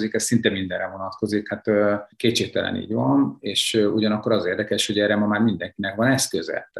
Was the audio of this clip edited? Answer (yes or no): no